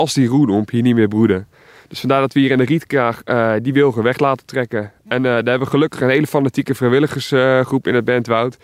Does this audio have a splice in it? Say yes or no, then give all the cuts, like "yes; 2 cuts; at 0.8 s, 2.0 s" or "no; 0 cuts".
no; 0 cuts